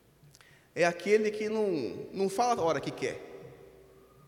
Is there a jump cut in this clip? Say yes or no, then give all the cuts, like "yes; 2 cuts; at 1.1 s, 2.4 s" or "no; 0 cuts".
no; 0 cuts